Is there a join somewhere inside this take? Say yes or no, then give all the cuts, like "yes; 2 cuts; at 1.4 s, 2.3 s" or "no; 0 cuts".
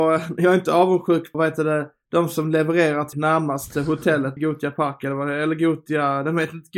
yes; 3 cuts; at 1.3 s, 3.1 s, 4.4 s